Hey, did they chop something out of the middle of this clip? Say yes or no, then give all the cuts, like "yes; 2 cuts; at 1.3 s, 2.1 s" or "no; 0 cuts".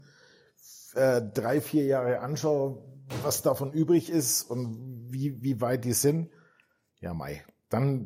no; 0 cuts